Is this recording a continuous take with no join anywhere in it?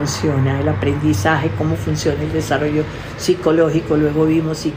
yes; 0 cuts

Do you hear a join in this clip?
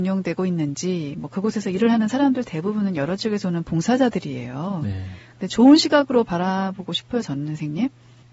no; 0 cuts

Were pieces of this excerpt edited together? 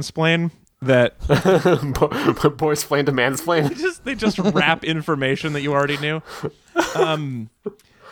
no; 0 cuts

